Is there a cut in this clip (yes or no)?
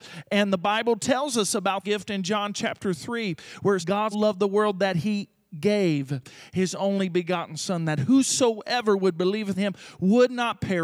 yes